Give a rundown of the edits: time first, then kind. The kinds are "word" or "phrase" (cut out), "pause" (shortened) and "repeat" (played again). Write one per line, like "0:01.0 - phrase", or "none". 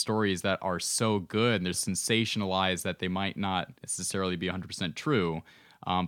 0:01.7 - word
0:03.8 - pause